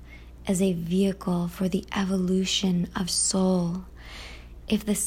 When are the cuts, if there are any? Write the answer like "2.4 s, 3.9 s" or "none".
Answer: 3.1 s